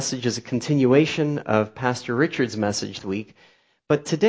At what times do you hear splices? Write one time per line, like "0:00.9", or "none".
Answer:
0:03.0